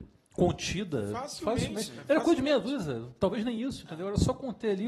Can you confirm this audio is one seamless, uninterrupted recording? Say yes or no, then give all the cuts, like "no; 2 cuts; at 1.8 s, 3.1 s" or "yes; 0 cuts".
yes; 0 cuts